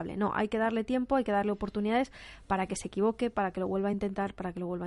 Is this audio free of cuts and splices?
yes; 0 cuts

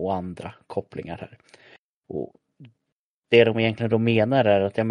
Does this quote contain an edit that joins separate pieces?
no; 0 cuts

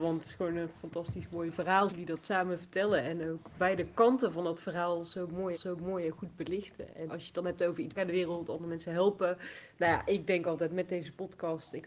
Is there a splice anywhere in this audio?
yes; 4 cuts; at 1.9 s, 5.5 s, 7.1 s, 7.9 s

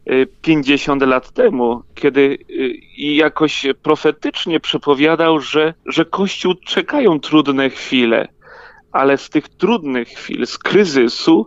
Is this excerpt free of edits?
no; 2 cuts; at 2.8 s, 5.8 s

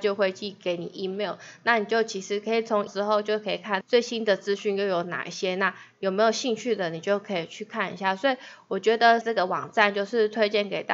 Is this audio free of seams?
no; 3 cuts; at 2.9 s, 3.8 s, 9.2 s

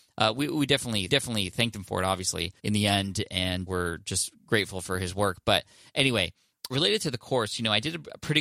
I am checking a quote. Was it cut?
yes; 4 cuts; at 1.1 s, 2.6 s, 3.7 s, 6.7 s

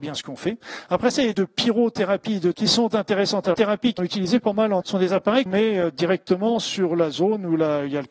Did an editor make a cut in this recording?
yes; 6 cuts; at 1.3 s, 2.5 s, 3.5 s, 4.0 s, 4.8 s, 5.5 s

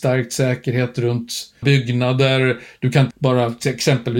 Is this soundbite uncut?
no; 2 cuts; at 1.6 s, 3.1 s

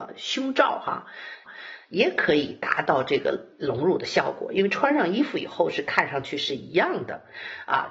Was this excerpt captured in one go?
no; 1 cut; at 1.5 s

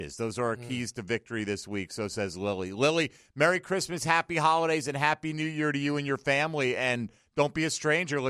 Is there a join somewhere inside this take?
no; 0 cuts

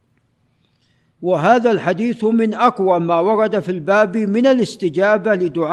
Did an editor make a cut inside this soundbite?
no; 0 cuts

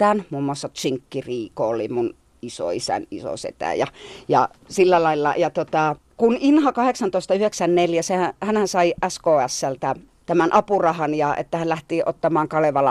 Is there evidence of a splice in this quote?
no; 0 cuts

